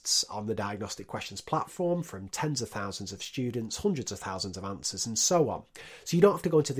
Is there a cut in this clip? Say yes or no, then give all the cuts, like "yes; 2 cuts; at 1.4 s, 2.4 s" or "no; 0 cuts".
no; 0 cuts